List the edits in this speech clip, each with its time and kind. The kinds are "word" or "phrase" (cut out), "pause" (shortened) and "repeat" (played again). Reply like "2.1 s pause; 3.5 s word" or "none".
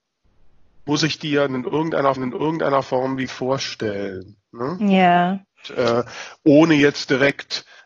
2.2 s repeat; 3.3 s word